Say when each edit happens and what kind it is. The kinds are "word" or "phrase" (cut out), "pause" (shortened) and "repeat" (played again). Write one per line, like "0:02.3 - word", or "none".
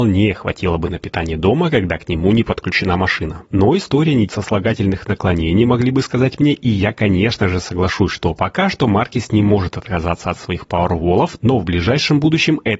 0:03.5 - pause
0:04.3 - word